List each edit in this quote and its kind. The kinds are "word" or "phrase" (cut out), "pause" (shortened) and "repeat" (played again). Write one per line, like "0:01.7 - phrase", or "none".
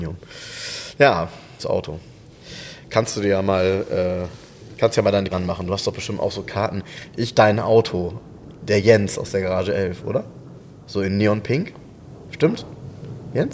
0:01.6 - word
0:05.3 - word
0:07.3 - word